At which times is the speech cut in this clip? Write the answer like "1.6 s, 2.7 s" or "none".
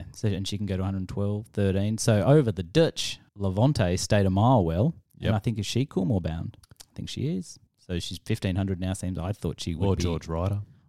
3.3 s, 5.1 s, 6.6 s, 7.7 s